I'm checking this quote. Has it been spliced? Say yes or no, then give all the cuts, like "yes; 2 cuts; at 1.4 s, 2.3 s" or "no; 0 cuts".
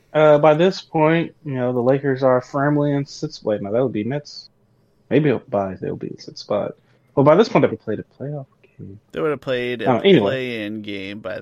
yes; 2 cuts; at 5.8 s, 7.7 s